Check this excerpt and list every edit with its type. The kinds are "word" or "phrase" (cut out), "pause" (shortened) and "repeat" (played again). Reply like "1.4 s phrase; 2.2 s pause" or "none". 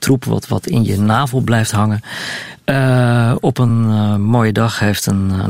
none